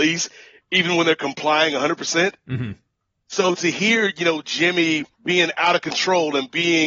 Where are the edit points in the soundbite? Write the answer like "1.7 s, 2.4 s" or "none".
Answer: 5.1 s